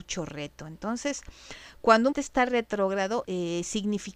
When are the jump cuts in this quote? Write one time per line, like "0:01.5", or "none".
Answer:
0:02.1
0:03.3